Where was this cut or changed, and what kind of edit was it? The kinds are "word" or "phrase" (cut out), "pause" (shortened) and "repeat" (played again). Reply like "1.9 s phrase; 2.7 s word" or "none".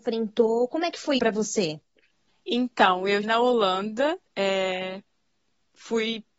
1.2 s word; 2.3 s pause; 3.2 s word; 4.3 s pause